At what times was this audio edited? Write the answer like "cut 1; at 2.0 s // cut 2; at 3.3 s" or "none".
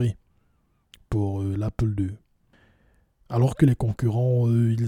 none